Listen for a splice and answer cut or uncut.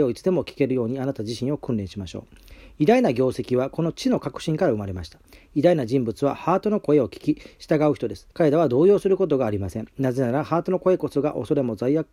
cut